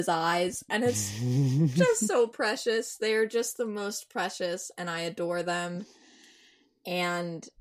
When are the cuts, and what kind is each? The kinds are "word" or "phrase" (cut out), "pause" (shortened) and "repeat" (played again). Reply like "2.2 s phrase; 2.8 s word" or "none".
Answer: none